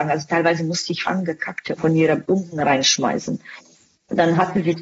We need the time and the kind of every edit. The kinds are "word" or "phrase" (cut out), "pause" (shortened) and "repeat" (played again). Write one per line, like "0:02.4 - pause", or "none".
0:01.0 - word
0:01.8 - phrase
0:02.2 - word